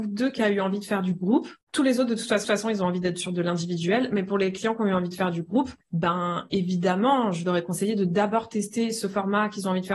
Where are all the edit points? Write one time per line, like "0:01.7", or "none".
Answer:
0:01.6
0:02.4
0:05.8